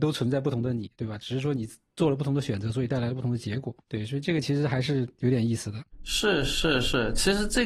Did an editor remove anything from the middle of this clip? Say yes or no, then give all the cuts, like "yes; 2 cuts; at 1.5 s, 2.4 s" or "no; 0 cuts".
yes; 1 cut; at 3.8 s